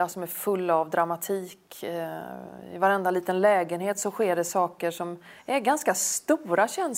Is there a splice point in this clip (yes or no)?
no